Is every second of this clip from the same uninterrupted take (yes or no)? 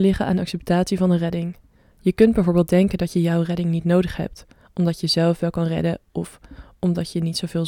yes